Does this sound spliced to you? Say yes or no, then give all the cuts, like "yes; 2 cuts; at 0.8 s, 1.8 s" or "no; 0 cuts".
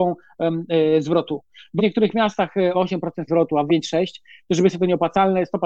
yes; 5 cuts; at 1.8 s, 2.7 s, 3.3 s, 3.7 s, 4.7 s